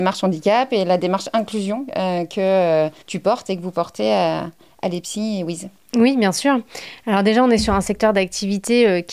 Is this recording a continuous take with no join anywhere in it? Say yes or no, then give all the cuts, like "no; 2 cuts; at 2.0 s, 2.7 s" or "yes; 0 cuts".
no; 1 cut; at 3.0 s